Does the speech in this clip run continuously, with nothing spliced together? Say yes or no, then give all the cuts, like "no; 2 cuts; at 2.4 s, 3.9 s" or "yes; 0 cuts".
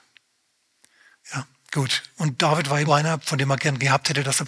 no; 1 cut; at 2.9 s